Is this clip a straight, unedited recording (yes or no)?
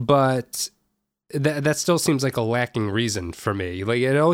yes